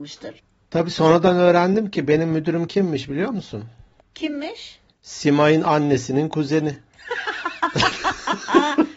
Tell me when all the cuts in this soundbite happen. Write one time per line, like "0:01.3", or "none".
none